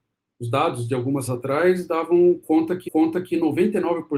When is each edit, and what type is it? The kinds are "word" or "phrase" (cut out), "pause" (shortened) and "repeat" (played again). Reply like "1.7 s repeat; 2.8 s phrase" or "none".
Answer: 1.3 s word; 2.9 s repeat